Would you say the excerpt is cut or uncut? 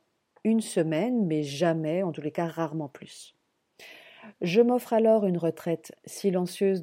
uncut